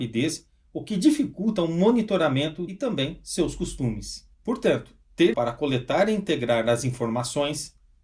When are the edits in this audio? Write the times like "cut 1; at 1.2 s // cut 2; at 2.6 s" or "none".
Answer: cut 1; at 2.7 s // cut 2; at 4.3 s // cut 3; at 5.3 s